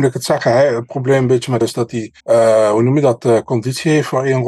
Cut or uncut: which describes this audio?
cut